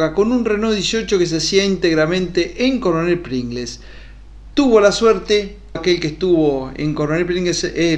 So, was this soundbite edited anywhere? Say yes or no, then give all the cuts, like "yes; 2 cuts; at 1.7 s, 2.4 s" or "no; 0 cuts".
yes; 1 cut; at 5.7 s